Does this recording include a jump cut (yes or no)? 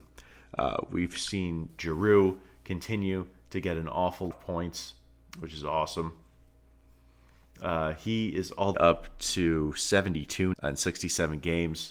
yes